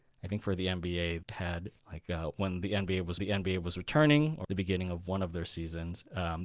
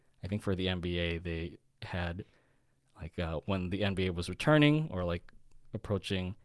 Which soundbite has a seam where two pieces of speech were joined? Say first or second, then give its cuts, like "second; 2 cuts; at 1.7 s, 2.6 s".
first; 4 cuts; at 1.2 s, 1.8 s, 3.2 s, 4.4 s